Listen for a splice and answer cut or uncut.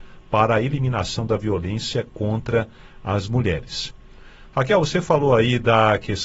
uncut